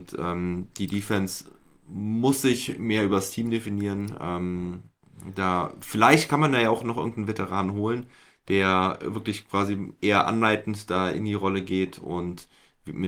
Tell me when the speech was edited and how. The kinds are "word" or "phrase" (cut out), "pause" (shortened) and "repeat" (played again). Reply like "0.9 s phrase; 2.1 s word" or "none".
none